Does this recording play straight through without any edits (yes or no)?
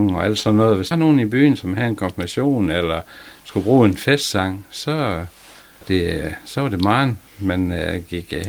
no